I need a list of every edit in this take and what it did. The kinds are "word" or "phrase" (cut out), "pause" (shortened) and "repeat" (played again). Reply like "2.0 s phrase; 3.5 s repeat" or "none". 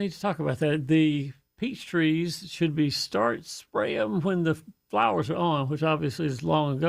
none

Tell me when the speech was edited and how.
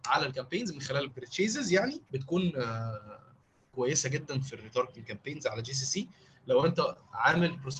1.1 s phrase; 2.1 s pause

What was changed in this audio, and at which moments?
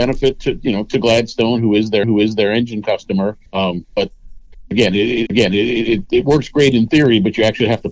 2.0 s repeat; 3.5 s pause; 5.3 s repeat

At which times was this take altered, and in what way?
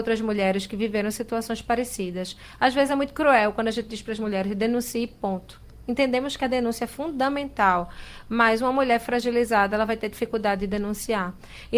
none

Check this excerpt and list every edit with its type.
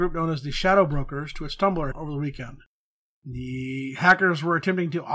1.9 s word

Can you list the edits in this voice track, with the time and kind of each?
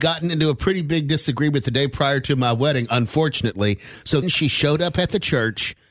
4.2 s word

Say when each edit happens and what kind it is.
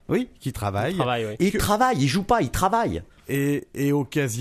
none

